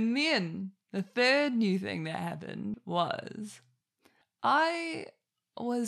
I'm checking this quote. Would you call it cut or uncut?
uncut